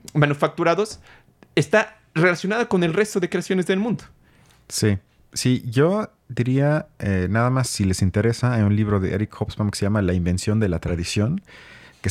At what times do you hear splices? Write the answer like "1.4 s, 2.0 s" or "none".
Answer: none